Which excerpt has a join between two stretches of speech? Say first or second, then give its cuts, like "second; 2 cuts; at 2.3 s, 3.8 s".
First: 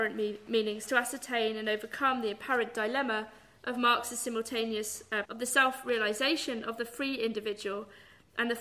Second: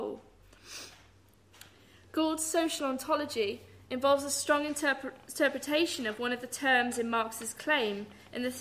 first; 1 cut; at 5.2 s